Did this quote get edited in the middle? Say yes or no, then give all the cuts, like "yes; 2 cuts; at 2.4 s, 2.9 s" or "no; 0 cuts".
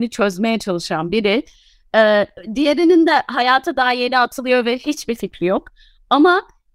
no; 0 cuts